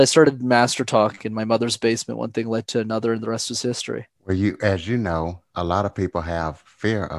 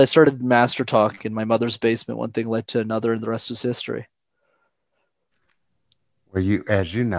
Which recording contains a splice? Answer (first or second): first